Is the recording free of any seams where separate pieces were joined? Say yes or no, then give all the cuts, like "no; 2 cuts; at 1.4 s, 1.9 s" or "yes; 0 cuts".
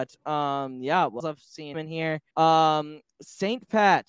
no; 3 cuts; at 1.2 s, 1.7 s, 2.3 s